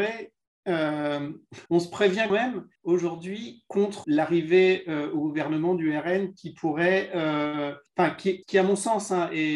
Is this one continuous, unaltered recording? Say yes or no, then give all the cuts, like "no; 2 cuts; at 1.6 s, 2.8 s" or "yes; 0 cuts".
no; 6 cuts; at 1.7 s, 2.3 s, 2.8 s, 4.0 s, 7.9 s, 8.4 s